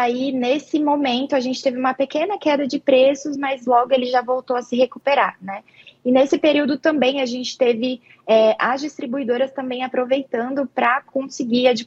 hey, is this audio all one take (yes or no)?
yes